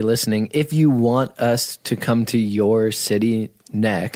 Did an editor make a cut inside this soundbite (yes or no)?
no